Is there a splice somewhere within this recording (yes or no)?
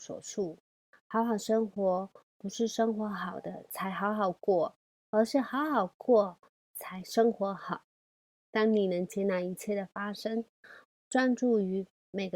no